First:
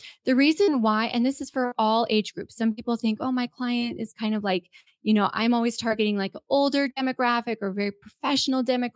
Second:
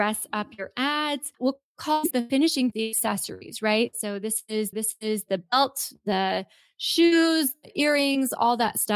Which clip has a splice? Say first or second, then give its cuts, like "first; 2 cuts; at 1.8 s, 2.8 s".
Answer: second; 4 cuts; at 1.3 s, 2.1 s, 2.7 s, 4.7 s